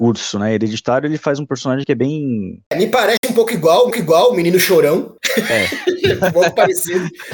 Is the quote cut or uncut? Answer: cut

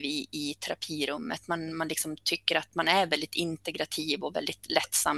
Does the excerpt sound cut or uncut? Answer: uncut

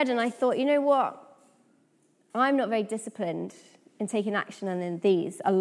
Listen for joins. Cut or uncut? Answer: uncut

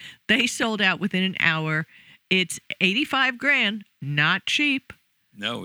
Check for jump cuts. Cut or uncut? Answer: uncut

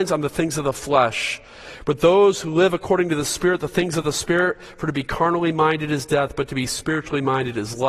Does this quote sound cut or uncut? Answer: uncut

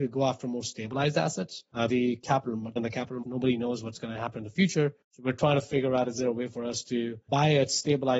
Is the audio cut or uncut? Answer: cut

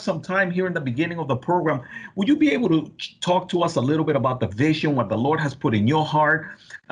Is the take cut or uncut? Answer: uncut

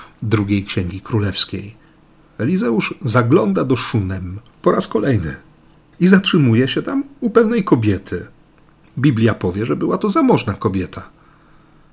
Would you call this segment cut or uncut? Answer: cut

